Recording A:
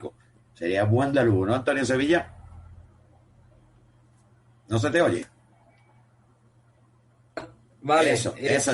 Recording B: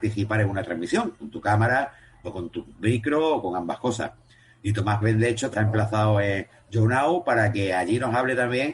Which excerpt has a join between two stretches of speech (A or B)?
B